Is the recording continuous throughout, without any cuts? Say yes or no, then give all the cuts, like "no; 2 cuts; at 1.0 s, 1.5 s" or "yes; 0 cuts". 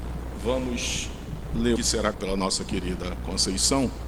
no; 2 cuts; at 1.8 s, 2.1 s